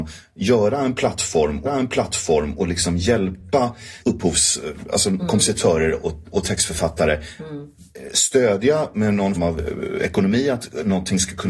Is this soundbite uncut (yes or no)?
no